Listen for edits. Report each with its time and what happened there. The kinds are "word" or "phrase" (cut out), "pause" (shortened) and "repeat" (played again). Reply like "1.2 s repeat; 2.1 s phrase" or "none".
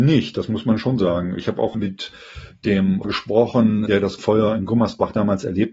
1.7 s word; 3.0 s word; 3.9 s word; 4.2 s word